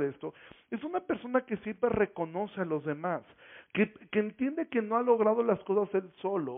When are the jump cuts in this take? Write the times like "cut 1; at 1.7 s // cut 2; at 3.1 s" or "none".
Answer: none